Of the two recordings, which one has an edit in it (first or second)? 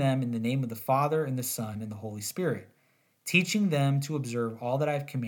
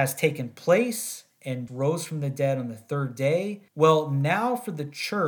second